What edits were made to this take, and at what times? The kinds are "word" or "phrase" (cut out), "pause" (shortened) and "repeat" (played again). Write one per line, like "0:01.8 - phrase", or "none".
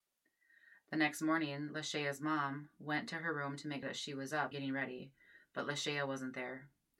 0:03.8 - word
0:04.5 - word